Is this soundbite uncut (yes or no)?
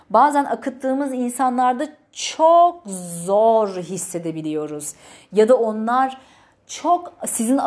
yes